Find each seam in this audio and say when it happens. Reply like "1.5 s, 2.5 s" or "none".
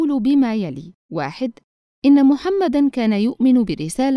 1.0 s